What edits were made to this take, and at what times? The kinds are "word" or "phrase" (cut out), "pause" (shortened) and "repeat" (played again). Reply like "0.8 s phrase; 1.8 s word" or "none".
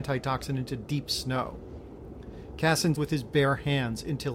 2.9 s word

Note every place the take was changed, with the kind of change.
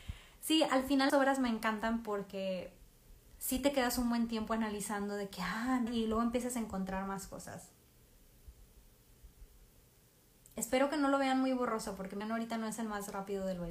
1.1 s word; 5.9 s word; 12.2 s word

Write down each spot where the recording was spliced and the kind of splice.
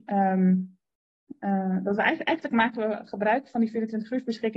none

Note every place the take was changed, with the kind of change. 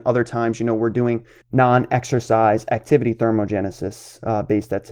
1.4 s pause

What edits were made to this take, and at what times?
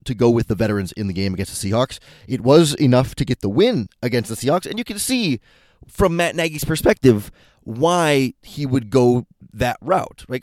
none

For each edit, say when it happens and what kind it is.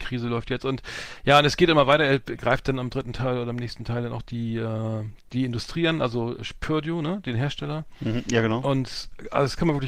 none

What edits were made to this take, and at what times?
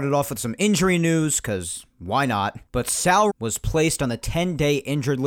2.7 s pause; 3.3 s word

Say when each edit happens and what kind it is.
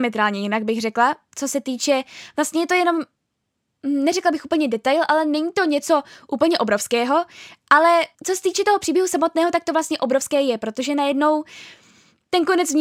8.1 s pause

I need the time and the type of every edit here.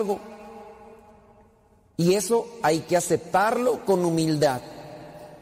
none

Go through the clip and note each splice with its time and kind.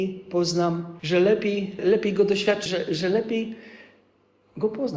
1.0 s word; 1.8 s word; 2.7 s word

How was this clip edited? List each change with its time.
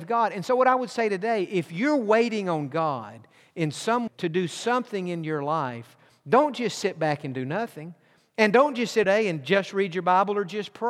4.1 s word; 9.0 s phrase

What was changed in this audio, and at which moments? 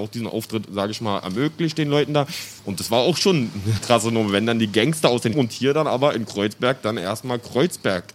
2.6 s pause; 3.8 s word; 5.3 s phrase

